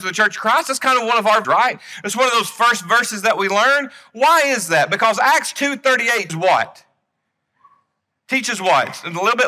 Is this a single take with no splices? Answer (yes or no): no